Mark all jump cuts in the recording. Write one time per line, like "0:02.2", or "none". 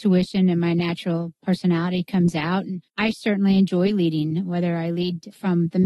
0:02.9